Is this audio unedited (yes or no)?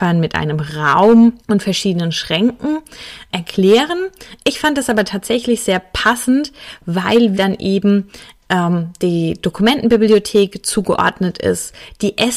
no